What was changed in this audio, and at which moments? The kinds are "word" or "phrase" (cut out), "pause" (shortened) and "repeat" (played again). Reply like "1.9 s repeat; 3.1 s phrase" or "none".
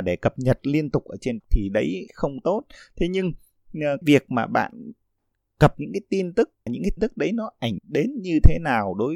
1.4 s word; 4.0 s word; 5.7 s word; 6.7 s word; 7.0 s word; 7.8 s word